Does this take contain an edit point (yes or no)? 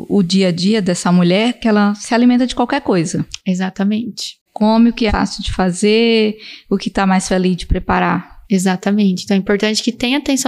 yes